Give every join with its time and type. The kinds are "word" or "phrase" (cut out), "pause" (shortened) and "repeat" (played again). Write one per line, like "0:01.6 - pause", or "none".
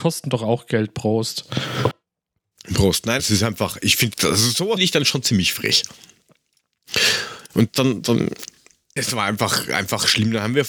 0:03.2 - word
0:04.1 - word
0:04.8 - word
0:07.7 - word
0:09.0 - word